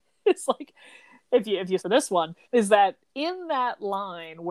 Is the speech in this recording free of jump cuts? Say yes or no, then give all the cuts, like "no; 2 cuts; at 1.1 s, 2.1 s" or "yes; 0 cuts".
no; 2 cuts; at 1.8 s, 2.4 s